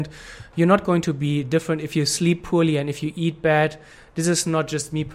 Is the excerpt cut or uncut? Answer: uncut